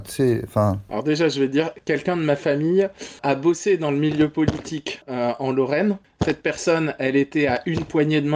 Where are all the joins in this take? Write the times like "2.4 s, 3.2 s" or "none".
none